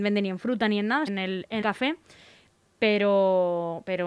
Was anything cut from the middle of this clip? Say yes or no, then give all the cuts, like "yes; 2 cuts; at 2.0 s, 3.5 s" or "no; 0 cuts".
yes; 2 cuts; at 1.1 s, 1.6 s